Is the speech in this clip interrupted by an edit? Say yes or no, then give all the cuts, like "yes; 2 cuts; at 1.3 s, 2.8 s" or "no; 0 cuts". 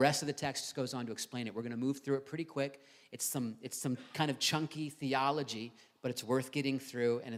no; 0 cuts